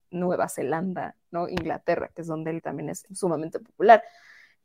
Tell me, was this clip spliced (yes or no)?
yes